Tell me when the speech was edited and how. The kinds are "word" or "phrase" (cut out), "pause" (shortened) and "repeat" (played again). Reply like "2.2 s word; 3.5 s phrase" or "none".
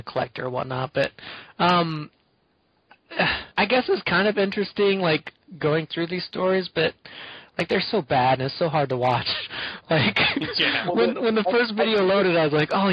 3.5 s pause